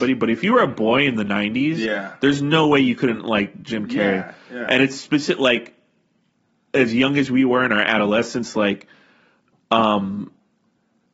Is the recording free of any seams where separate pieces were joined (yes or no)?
yes